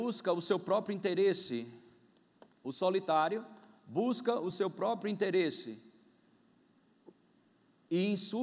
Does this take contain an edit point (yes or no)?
no